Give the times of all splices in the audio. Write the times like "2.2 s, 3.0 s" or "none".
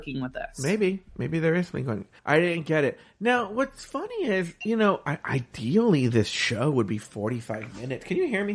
2.2 s